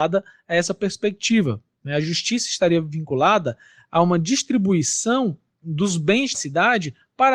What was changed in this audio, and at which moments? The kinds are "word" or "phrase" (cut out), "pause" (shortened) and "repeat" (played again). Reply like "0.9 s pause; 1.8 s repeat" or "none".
6.3 s word